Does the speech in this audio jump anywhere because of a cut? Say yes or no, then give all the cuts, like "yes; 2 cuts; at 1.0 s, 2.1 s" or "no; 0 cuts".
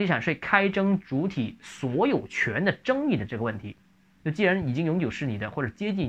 no; 0 cuts